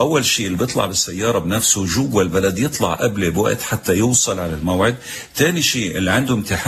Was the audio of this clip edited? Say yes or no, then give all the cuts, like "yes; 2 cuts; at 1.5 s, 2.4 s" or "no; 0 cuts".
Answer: no; 0 cuts